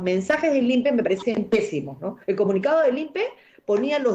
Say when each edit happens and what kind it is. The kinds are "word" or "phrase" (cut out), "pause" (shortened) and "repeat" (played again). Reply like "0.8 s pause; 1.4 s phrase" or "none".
2.2 s pause